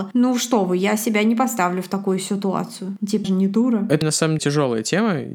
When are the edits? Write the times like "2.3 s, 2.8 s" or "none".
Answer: 3.2 s, 4.0 s, 4.4 s